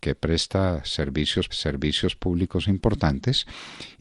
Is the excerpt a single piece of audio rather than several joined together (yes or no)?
no